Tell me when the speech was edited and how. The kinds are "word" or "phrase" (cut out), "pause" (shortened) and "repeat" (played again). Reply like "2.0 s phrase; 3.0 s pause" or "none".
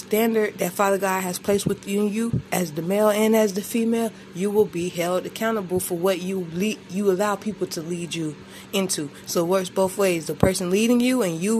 none